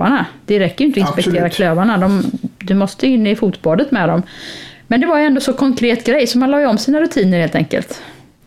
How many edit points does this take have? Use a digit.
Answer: 1